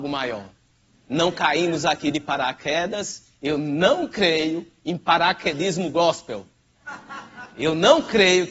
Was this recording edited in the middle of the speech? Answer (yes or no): no